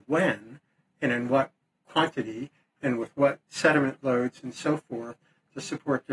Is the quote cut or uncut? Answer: uncut